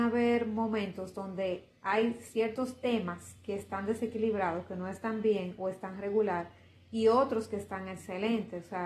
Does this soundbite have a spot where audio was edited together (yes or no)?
no